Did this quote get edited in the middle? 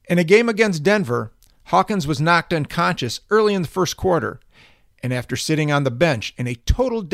no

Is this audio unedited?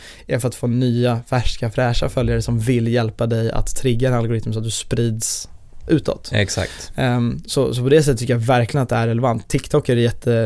yes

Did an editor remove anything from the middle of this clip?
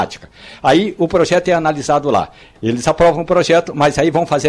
no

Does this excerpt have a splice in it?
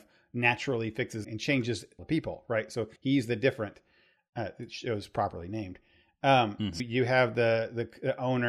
yes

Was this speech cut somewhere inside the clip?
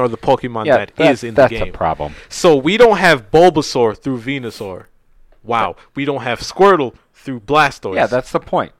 no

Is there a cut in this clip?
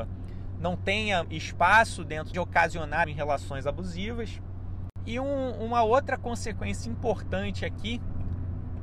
yes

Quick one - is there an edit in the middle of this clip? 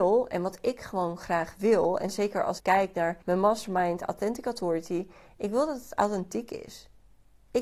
yes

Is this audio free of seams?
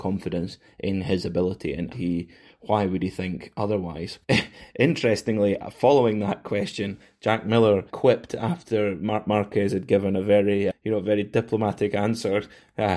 no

